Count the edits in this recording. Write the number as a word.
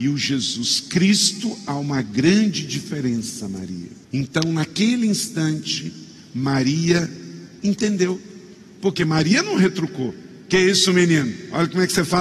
one